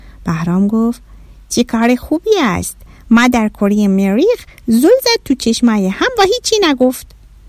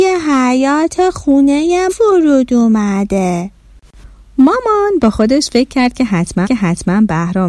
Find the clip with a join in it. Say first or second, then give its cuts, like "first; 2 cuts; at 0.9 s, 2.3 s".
second; 2 cuts; at 1.9 s, 6.4 s